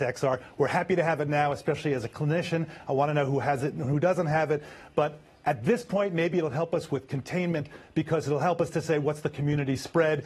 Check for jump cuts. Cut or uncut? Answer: uncut